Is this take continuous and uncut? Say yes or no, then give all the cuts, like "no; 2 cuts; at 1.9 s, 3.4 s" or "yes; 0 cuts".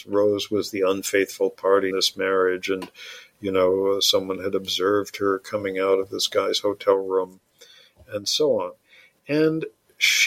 no; 1 cut; at 1.9 s